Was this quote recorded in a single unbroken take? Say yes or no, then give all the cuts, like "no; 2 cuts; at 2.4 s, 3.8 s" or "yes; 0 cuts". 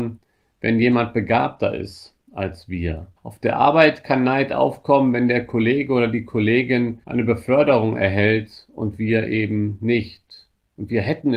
no; 2 cuts; at 3.2 s, 7.0 s